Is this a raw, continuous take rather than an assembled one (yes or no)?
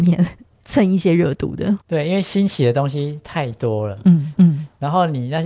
no